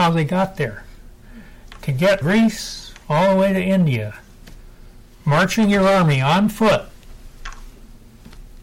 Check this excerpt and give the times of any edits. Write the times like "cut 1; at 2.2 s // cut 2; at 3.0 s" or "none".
cut 1; at 2.2 s